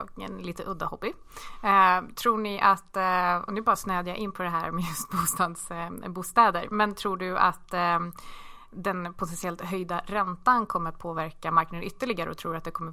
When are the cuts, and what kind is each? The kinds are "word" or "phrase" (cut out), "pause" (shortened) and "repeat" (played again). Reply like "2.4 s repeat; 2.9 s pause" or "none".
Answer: none